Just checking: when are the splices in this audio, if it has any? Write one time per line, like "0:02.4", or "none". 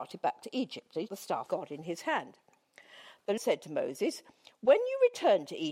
0:01.1
0:01.5
0:03.4